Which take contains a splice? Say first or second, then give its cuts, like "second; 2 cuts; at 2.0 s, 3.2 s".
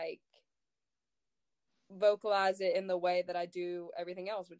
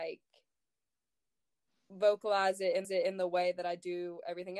second; 1 cut; at 2.8 s